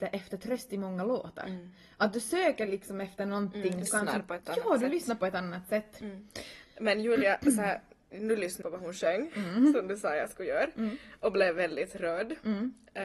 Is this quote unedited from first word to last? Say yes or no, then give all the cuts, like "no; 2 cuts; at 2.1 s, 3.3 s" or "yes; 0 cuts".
no; 2 cuts; at 3.9 s, 8.6 s